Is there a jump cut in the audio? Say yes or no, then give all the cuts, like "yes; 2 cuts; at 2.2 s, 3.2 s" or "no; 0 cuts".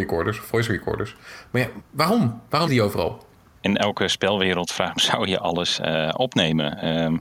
yes; 3 cuts; at 1.8 s, 2.7 s, 5.0 s